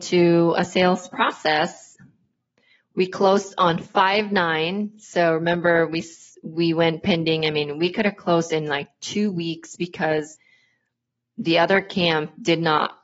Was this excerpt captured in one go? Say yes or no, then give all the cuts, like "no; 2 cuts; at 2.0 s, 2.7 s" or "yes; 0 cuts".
yes; 0 cuts